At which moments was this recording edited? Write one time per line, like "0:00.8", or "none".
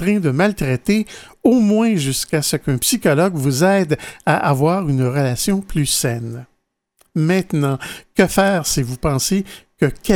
none